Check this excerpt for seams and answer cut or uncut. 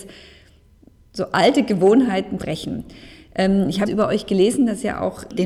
cut